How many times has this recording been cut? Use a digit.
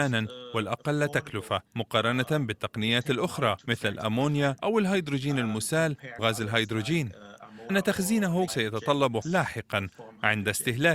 7